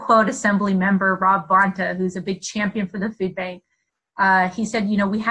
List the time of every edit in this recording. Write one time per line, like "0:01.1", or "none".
none